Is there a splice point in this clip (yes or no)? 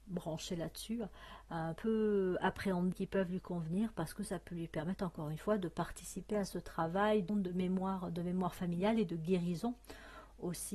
yes